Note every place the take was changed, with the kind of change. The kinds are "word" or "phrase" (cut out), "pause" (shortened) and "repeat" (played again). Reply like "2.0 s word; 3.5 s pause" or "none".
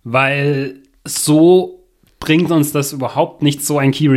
none

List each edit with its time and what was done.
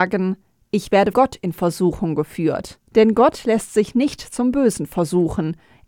1.1 s word; 2.9 s pause

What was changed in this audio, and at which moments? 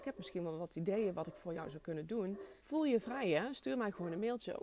2.6 s pause

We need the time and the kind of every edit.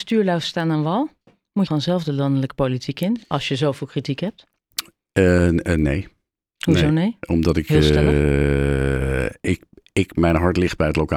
1.7 s phrase

